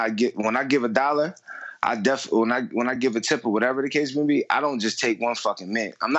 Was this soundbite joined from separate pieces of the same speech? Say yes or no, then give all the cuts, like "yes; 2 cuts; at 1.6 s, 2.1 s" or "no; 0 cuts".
no; 0 cuts